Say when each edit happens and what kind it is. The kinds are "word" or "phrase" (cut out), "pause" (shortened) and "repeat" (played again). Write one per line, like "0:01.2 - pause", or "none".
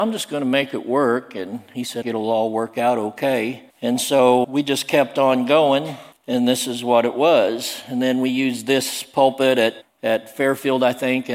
0:02.0 - phrase
0:03.7 - pause
0:04.4 - word
0:06.1 - pause
0:09.8 - word